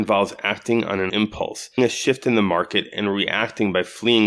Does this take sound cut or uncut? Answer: cut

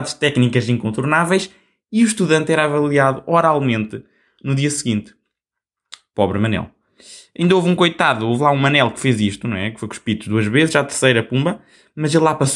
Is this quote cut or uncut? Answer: uncut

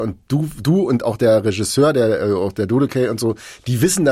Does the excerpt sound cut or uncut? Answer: uncut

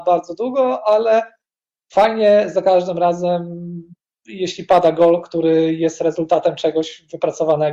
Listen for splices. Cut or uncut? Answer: uncut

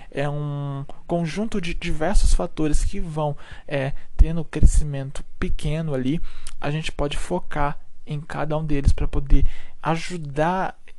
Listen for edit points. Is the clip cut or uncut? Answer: uncut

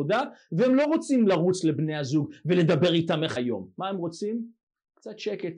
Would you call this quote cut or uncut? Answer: cut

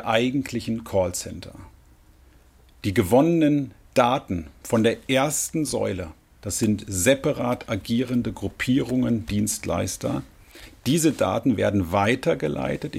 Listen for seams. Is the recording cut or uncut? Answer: uncut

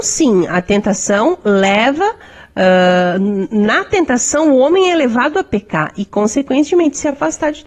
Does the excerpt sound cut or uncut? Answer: uncut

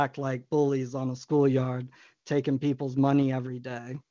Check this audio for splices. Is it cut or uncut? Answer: cut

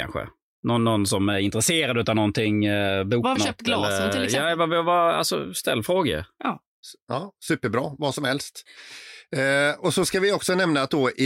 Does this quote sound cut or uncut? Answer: cut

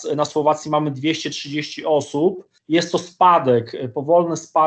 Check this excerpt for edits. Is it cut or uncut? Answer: cut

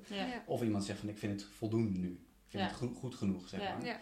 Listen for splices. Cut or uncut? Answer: uncut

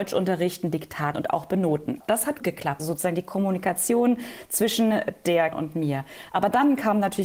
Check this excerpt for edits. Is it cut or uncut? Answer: cut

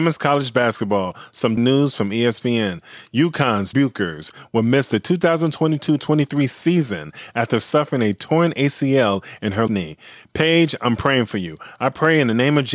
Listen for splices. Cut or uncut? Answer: cut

